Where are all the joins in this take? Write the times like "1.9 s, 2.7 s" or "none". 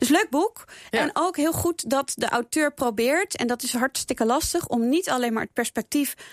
none